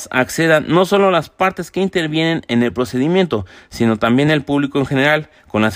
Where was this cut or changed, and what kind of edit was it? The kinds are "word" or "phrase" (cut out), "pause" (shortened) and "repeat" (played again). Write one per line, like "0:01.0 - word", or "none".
none